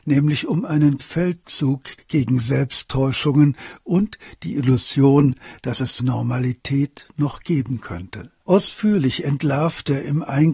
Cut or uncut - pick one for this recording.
cut